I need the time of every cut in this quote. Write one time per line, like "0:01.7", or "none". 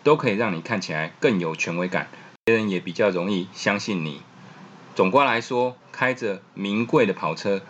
0:02.4
0:05.8